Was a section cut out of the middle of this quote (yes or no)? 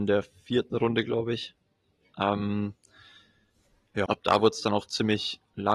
yes